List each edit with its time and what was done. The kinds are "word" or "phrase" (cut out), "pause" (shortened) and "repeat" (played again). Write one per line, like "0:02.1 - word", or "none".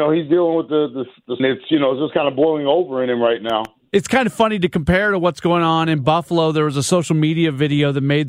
0:01.4 - phrase